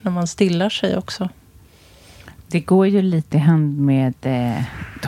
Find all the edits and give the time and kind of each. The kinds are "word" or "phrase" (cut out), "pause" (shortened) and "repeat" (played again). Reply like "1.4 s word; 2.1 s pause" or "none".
3.3 s word